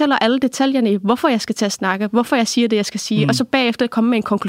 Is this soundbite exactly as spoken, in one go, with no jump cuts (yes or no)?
yes